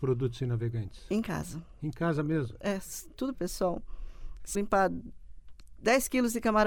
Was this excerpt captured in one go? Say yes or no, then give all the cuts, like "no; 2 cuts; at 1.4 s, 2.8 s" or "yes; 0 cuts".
no; 2 cuts; at 3.3 s, 4.5 s